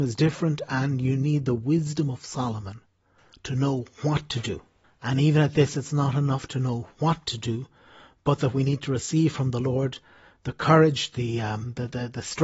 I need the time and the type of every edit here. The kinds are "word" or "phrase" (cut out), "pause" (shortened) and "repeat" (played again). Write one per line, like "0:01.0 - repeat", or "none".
0:04.8 - pause